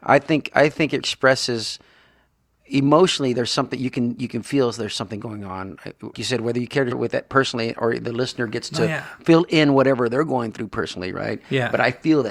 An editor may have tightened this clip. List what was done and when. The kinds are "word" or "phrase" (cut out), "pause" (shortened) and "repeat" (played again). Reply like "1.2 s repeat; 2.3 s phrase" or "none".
1.0 s word; 6.1 s word; 6.9 s word

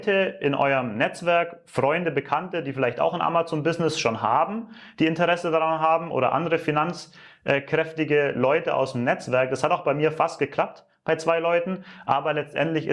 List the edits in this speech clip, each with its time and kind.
none

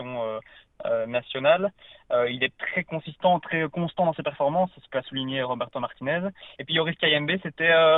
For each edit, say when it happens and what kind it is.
6.5 s pause

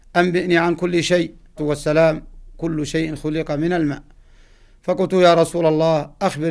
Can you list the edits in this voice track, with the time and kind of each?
1.6 s phrase

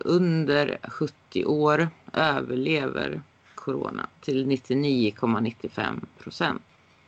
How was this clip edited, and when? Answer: none

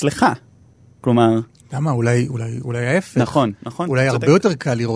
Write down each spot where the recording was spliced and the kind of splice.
none

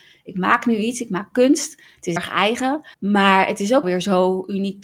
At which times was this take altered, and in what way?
2.2 s word; 2.9 s pause; 3.8 s word

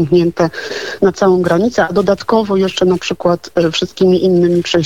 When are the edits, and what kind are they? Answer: none

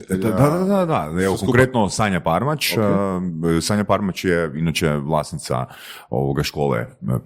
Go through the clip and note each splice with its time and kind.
none

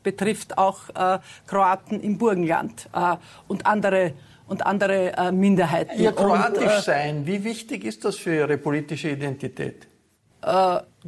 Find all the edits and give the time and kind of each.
none

